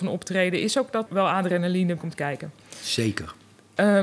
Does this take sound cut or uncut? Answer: cut